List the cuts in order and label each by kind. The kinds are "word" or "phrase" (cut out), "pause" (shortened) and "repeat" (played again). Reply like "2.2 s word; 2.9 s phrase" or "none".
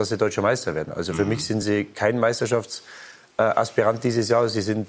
none